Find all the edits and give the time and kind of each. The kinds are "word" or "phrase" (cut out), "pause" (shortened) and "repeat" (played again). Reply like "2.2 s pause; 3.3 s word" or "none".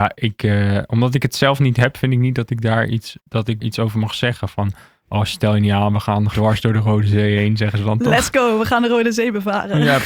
3.2 s pause; 3.6 s word; 6.3 s word